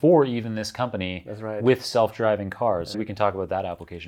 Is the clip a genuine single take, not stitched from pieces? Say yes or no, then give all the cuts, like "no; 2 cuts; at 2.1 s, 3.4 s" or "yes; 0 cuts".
no; 1 cut; at 2.9 s